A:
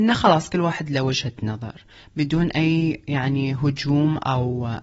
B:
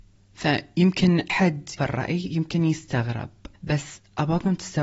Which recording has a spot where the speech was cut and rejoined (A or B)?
B